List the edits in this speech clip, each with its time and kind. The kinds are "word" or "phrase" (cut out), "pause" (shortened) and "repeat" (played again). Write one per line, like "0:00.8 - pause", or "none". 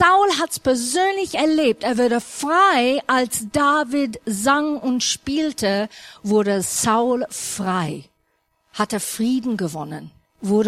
none